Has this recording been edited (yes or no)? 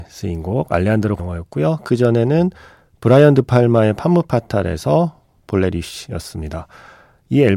yes